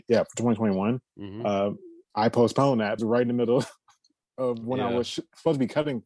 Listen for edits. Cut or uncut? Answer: cut